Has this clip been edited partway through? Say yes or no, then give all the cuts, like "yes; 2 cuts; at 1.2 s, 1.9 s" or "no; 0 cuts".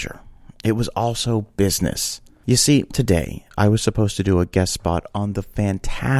yes; 1 cut; at 2.9 s